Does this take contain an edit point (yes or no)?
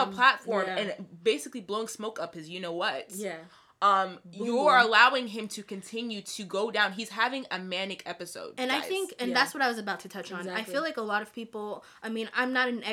no